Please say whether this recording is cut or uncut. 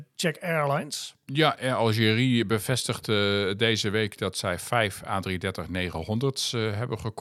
uncut